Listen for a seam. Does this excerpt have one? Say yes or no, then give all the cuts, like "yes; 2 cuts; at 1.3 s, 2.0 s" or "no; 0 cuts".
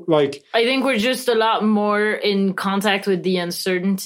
no; 0 cuts